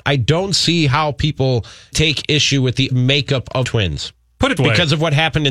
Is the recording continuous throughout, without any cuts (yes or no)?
no